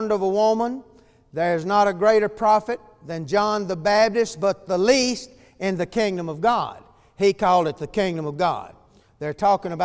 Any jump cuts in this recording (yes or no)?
no